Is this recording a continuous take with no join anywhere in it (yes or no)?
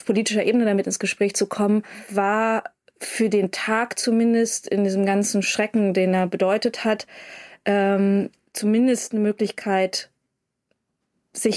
yes